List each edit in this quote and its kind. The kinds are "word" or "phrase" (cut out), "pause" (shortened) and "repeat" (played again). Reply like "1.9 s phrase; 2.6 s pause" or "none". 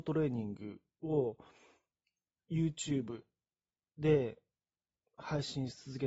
none